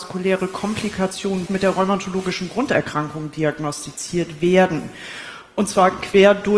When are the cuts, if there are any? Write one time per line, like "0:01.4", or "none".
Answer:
0:01.5